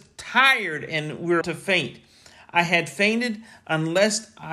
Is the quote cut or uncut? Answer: cut